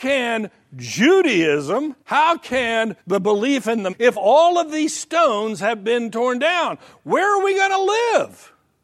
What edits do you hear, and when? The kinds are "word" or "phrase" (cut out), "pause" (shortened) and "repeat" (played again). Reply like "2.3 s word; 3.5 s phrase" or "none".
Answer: 2.0 s pause; 3.0 s pause; 3.9 s phrase